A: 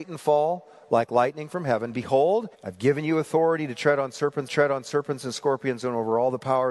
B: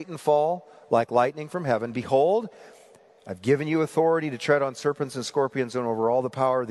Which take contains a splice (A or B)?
A